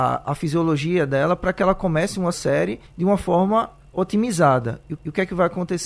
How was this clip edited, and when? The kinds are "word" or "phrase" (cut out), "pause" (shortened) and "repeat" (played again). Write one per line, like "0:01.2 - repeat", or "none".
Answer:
0:02.3 - word
0:02.9 - pause
0:05.0 - repeat